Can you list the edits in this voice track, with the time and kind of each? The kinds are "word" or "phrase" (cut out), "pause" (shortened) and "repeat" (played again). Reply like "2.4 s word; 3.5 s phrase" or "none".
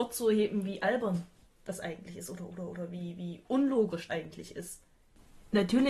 4.1 s word